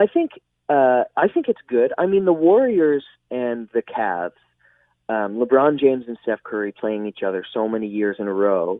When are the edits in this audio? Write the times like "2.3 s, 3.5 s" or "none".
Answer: none